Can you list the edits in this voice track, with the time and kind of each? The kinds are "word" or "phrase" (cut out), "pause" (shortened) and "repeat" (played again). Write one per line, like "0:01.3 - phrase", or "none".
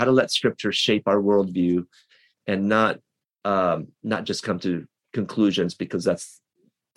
none